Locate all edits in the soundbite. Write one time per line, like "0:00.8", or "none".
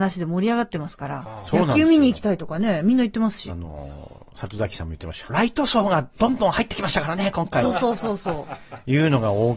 0:05.3

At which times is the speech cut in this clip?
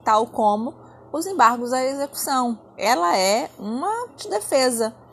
0:02.7
0:04.2

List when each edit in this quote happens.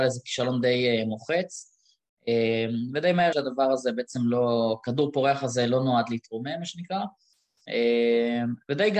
0:03.3

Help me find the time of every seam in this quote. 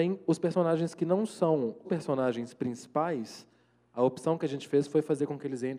0:01.8

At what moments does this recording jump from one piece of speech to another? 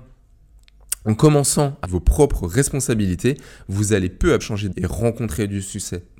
0:01.8
0:04.4
0:04.7

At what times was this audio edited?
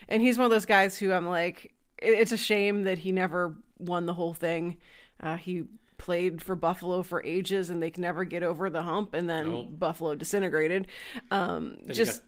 0:02.3
0:08.0

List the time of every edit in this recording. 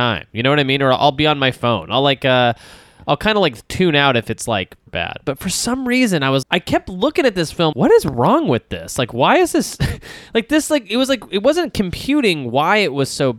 0:04.9
0:06.4
0:07.7

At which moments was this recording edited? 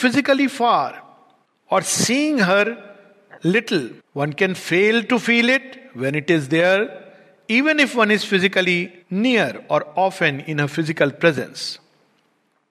0:01.5
0:04.0
0:09.0

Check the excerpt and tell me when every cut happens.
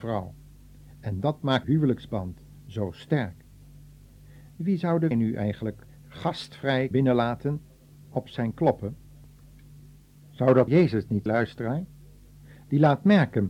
0:01.6
0:05.1
0:06.9
0:10.7
0:11.3

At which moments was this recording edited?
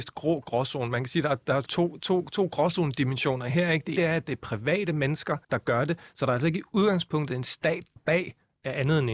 0:01.7
0:04.0
0:05.4
0:08.0

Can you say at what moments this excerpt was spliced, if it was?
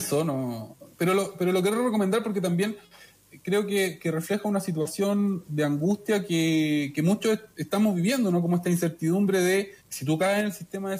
0:00.9
0:07.5
0:09.8

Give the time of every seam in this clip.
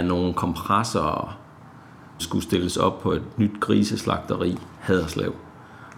0:02.2
0:04.8

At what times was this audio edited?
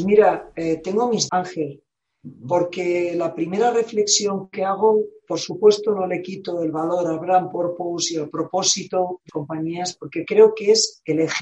0:01.3
0:09.3

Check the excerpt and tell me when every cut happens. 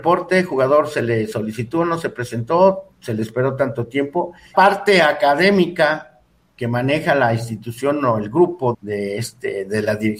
0:02.9
0:04.5
0:08.7

